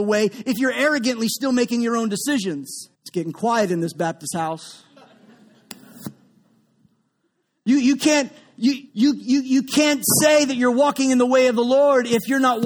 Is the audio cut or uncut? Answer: cut